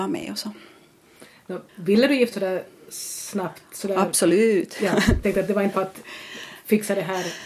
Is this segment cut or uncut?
cut